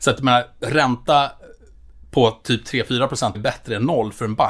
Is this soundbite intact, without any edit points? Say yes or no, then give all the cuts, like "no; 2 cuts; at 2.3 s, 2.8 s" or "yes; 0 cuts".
no; 1 cut; at 3.3 s